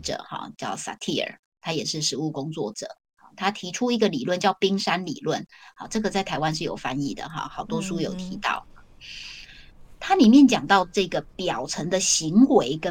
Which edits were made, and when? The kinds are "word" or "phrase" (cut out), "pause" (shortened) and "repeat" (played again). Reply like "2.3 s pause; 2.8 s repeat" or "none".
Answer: 7.5 s word

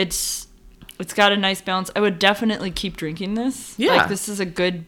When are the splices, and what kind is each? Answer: none

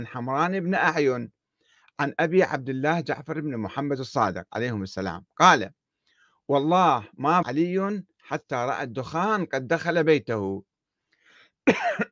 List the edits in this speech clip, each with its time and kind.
7.4 s word

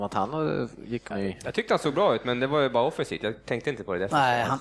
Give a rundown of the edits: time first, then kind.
1.1 s phrase

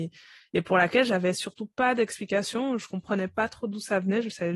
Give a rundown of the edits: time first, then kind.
none

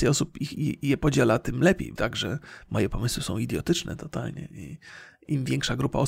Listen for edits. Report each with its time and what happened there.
2.0 s phrase

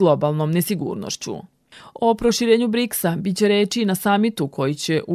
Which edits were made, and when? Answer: none

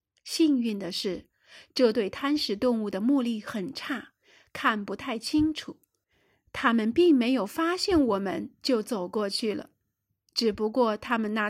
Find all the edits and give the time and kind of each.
none

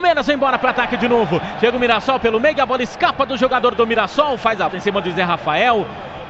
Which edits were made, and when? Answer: 4.7 s word

